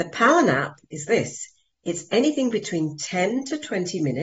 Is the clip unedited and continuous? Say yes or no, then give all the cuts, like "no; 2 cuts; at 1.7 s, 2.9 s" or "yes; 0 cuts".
yes; 0 cuts